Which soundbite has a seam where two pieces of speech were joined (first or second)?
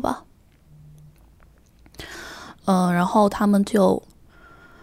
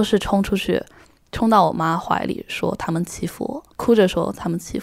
second